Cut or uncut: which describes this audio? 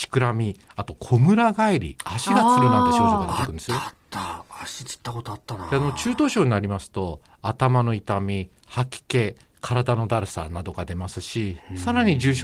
uncut